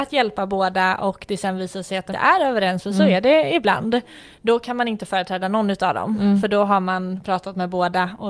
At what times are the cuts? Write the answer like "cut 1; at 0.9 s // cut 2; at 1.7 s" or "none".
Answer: cut 1; at 2.1 s